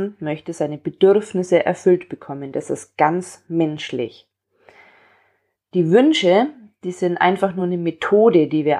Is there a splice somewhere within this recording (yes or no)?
no